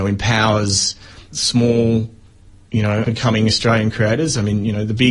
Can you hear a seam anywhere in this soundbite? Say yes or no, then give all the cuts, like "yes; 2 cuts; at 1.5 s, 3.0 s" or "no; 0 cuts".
yes; 2 cuts; at 1.3 s, 3.0 s